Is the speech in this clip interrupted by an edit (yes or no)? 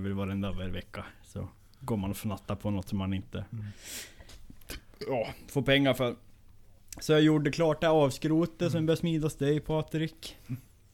no